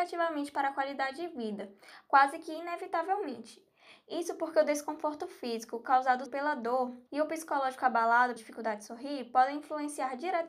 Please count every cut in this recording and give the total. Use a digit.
3